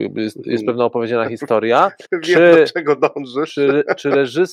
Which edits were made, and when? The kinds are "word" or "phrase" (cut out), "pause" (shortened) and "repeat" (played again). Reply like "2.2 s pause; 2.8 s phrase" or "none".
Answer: 2.0 s pause